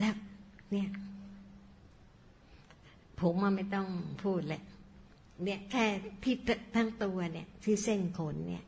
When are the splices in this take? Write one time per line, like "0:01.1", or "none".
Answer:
none